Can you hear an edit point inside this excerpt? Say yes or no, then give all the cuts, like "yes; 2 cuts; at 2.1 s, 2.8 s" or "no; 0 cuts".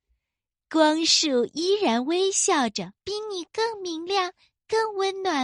yes; 1 cut; at 3.0 s